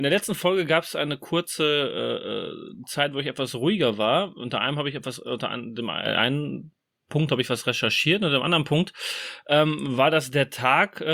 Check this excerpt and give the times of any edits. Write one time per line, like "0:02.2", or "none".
none